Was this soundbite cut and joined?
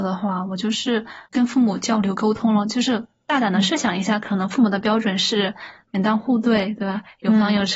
yes; 1 cut; at 1.3 s

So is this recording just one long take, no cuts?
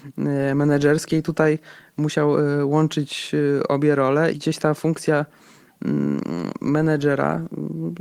no; 1 cut; at 4.3 s

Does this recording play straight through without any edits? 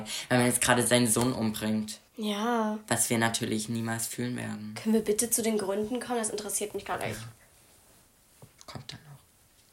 no; 1 cut; at 2.1 s

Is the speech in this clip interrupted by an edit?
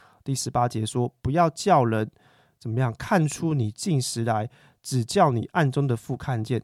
no; 0 cuts

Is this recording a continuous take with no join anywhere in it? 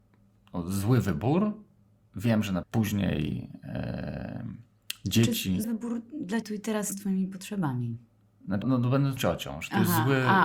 no; 6 cuts; at 2.6 s, 5.6 s, 6.4 s, 6.9 s, 8.6 s, 9.2 s

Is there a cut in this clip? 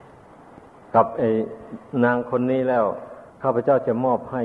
yes; 1 cut; at 3.3 s

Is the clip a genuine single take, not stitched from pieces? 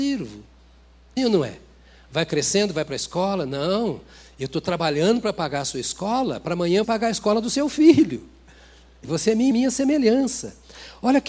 no; 4 cuts; at 1.2 s, 6.8 s, 9.0 s, 9.5 s

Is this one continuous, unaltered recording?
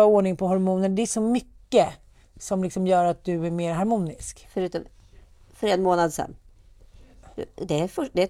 yes; 0 cuts

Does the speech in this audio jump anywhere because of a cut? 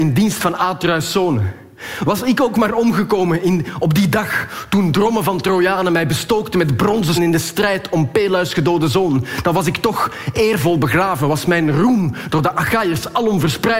yes; 1 cut; at 7.1 s

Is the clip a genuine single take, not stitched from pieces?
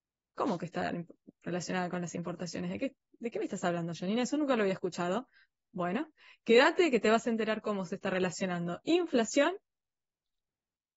yes; 0 cuts

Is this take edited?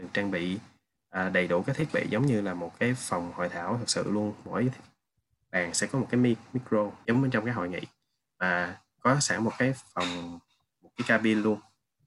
no; 0 cuts

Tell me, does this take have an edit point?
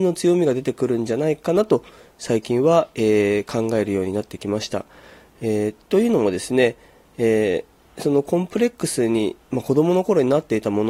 no; 0 cuts

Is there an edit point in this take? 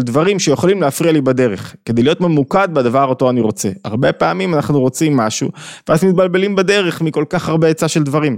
no; 0 cuts

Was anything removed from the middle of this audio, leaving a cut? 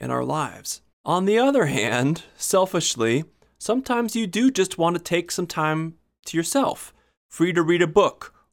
yes; 1 cut; at 0.9 s

